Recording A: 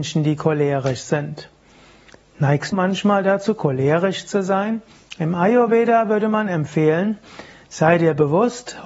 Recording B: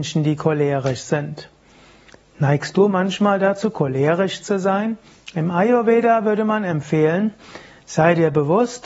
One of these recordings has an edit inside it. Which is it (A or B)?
A